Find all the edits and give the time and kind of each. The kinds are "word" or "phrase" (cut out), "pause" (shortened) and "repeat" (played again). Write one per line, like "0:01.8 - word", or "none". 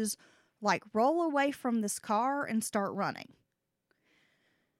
none